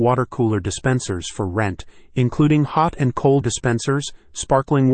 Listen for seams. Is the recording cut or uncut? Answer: cut